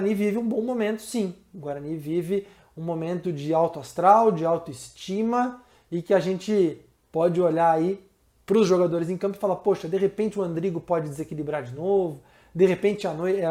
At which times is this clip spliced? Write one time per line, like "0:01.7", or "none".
none